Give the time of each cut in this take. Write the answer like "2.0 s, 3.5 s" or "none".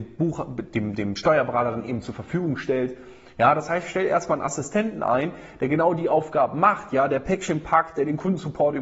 none